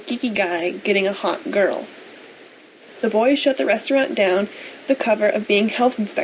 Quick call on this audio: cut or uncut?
cut